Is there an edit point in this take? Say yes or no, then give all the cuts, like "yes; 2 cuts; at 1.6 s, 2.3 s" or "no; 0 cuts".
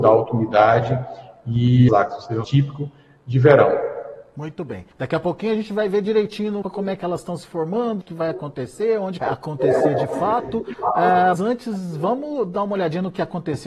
yes; 7 cuts; at 1.9 s, 2.4 s, 4.9 s, 6.6 s, 8.0 s, 9.2 s, 11.4 s